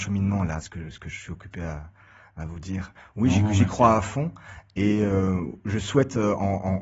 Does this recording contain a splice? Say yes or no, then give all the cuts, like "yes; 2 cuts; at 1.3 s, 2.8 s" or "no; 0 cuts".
no; 0 cuts